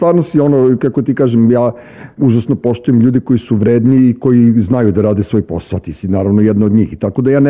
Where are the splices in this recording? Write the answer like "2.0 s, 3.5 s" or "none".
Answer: 2.2 s